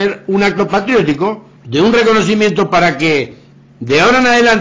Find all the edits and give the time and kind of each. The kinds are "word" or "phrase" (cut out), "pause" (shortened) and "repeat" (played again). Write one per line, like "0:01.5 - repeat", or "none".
0:01.6 - pause

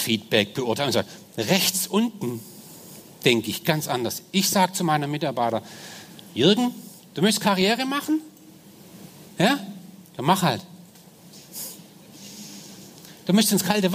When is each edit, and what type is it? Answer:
0:06.3 - pause
0:09.3 - pause

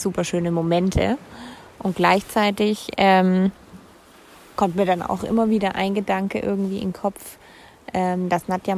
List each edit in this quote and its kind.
none

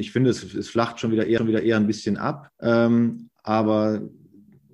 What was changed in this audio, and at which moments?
0:01.4 - repeat
0:02.5 - pause

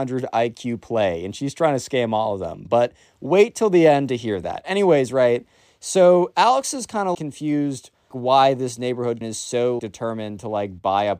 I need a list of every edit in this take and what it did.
0:07.1 - word
0:08.1 - word
0:09.2 - word
0:09.8 - word

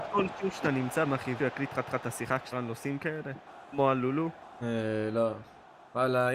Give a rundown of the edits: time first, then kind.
0:01.1 - word
0:01.4 - word
0:01.8 - repeat
0:02.5 - word
0:03.5 - pause
0:04.4 - pause

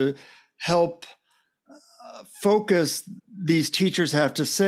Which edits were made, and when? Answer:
0:03.2 - word

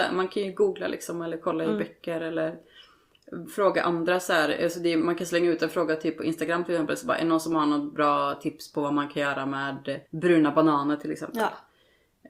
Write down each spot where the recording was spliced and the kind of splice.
0:10.1 - pause

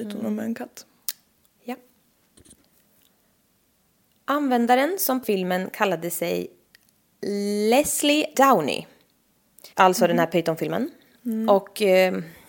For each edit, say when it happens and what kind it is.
0:05.2 - word
0:08.3 - word
0:09.7 - pause

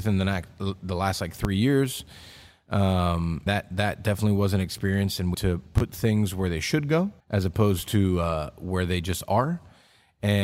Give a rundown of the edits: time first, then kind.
0:03.5 - word
0:05.3 - phrase
0:07.2 - pause

